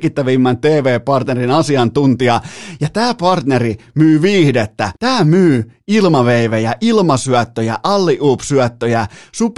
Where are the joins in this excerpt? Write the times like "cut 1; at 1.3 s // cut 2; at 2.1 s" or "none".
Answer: cut 1; at 5.0 s